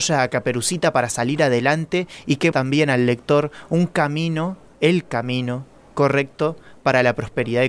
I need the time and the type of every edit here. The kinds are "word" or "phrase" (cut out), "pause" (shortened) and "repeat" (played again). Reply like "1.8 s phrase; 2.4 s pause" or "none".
2.5 s word